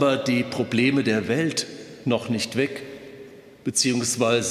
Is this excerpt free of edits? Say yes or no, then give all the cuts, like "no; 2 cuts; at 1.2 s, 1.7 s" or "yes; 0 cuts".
yes; 0 cuts